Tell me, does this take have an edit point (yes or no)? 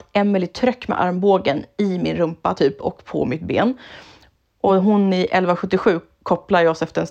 no